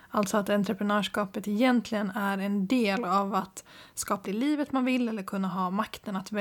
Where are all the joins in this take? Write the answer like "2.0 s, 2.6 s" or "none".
4.2 s